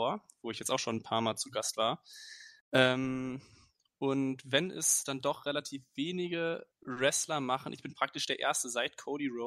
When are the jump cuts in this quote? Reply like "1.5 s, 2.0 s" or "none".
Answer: 6.7 s

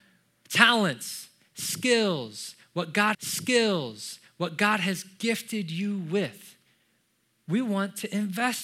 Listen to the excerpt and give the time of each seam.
3.1 s

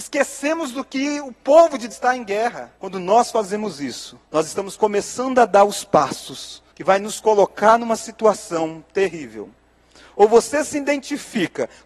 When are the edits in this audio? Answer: 1.9 s, 2.8 s, 4.3 s, 6.7 s

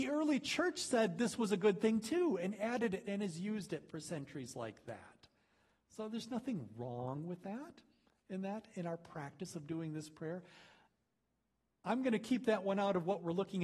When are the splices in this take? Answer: none

